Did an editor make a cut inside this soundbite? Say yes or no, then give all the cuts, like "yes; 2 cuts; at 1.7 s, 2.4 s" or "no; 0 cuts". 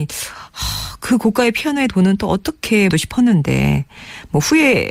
yes; 2 cuts; at 1.9 s, 2.9 s